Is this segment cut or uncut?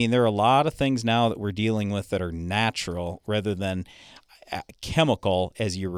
uncut